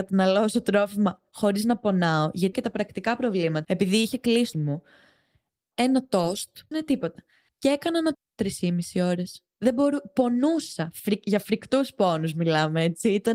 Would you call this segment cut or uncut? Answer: cut